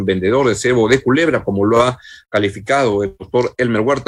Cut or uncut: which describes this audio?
uncut